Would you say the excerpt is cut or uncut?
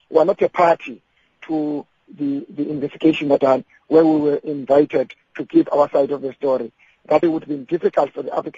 cut